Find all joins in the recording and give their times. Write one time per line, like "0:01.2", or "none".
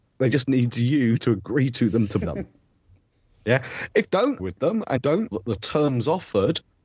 0:01.2
0:02.2
0:04.1
0:04.4
0:05.0
0:05.3